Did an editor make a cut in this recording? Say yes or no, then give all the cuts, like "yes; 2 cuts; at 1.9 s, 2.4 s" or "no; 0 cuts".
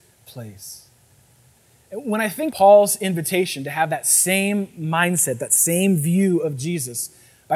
yes; 1 cut; at 2.5 s